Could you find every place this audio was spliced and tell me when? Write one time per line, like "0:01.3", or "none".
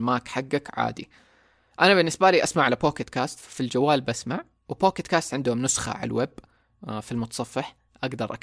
none